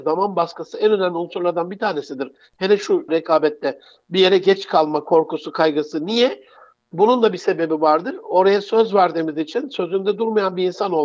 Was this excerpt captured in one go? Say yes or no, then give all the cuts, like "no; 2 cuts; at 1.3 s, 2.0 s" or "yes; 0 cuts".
no; 1 cut; at 3.1 s